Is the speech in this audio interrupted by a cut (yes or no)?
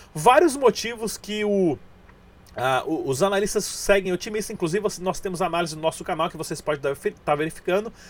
no